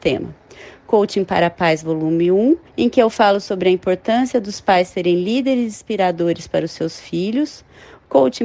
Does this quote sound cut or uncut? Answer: cut